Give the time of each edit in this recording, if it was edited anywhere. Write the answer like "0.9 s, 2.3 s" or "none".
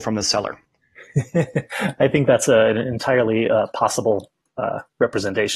none